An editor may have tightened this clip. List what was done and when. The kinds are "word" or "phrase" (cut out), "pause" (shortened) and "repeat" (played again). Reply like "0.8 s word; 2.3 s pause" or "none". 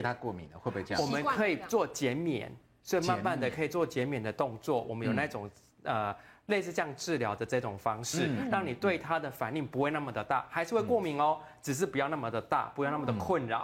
none